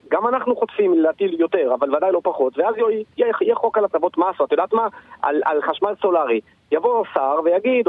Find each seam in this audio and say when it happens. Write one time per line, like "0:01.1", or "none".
none